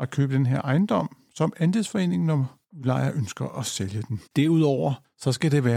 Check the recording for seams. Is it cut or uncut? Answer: cut